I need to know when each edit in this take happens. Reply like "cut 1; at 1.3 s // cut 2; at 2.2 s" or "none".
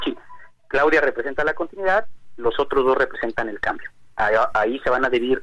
none